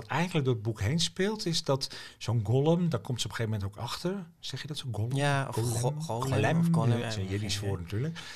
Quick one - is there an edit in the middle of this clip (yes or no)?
yes